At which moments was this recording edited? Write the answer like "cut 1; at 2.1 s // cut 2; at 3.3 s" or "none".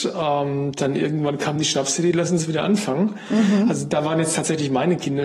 none